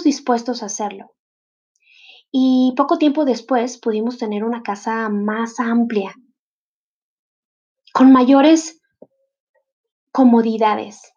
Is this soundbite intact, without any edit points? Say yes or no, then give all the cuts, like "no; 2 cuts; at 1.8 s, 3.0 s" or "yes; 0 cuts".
yes; 0 cuts